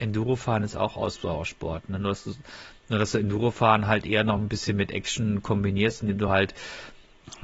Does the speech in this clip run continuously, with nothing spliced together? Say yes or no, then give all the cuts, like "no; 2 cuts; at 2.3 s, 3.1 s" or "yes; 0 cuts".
yes; 0 cuts